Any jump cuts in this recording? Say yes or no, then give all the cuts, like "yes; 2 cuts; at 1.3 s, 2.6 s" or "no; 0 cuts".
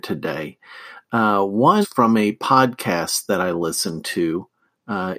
yes; 1 cut; at 1.8 s